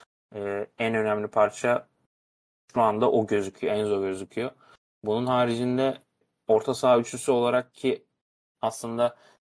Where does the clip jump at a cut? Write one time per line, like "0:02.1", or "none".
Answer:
none